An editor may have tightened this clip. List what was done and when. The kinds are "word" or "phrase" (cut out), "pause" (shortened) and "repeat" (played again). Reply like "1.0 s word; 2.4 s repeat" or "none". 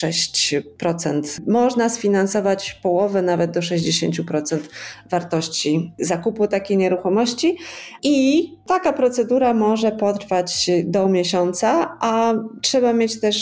none